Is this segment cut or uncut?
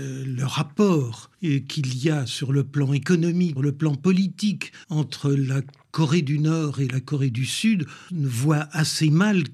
cut